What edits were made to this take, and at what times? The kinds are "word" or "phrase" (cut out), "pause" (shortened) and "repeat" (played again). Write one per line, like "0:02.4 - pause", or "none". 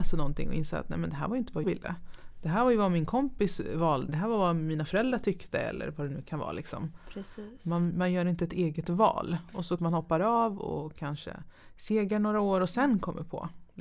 0:01.6 - word
0:04.1 - word
0:09.8 - word

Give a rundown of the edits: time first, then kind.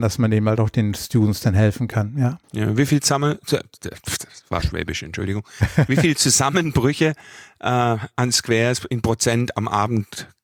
0:02.4 - pause

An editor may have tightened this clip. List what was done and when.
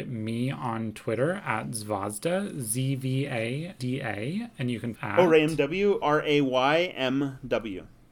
0:03.8 - word
0:04.9 - phrase
0:06.0 - word

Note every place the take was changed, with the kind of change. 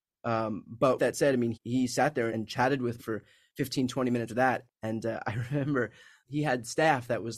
0:01.0 - word
0:01.5 - word
0:02.3 - word
0:03.0 - word
0:04.3 - word
0:04.7 - word
0:06.3 - word

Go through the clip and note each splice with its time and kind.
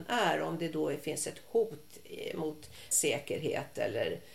0:02.9 - word

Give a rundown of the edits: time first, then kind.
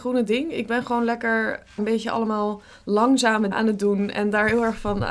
0:01.8 - word
0:03.5 - word

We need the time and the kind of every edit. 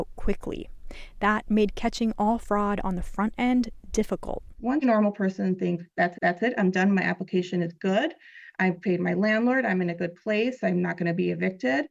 0:04.8 - phrase
0:06.1 - repeat

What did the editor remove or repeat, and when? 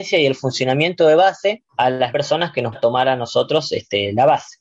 0:01.7 - pause
0:02.1 - word
0:02.7 - word

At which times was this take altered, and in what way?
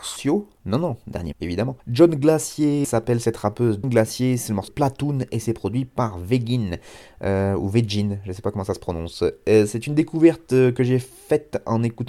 0:01.3 - word
0:01.8 - pause
0:02.8 - word
0:03.8 - word
0:04.7 - word

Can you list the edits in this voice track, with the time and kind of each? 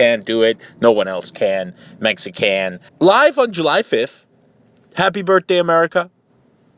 0:02.9 - pause

